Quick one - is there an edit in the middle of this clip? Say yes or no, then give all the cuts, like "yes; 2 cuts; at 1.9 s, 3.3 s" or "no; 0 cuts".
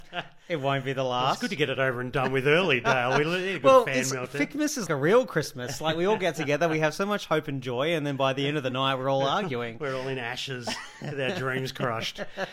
yes; 1 cut; at 4.9 s